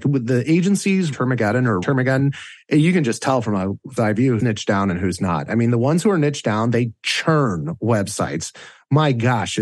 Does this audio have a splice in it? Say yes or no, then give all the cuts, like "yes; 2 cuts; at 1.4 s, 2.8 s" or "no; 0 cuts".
yes; 4 cuts; at 1.1 s, 1.8 s, 4.0 s, 4.4 s